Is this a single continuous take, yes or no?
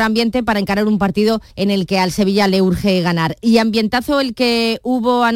no